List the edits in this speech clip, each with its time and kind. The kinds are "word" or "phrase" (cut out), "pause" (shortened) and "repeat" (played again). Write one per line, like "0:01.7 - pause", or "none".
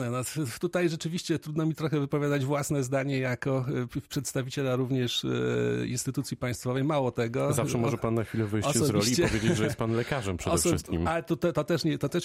none